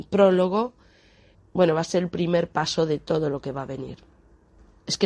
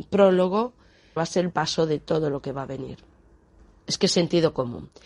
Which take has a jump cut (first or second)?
second